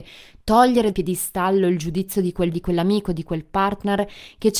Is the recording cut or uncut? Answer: cut